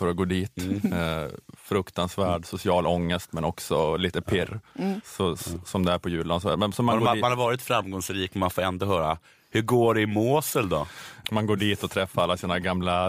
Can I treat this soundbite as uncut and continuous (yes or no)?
yes